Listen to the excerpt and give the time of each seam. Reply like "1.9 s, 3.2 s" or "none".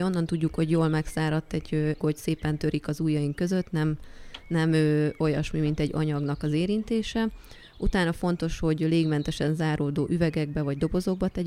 2.0 s